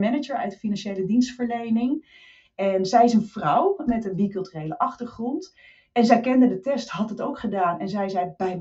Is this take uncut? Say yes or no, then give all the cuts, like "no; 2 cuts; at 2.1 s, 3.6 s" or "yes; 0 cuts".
yes; 0 cuts